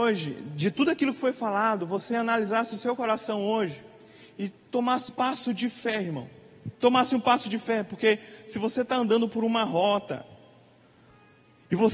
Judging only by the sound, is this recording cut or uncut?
cut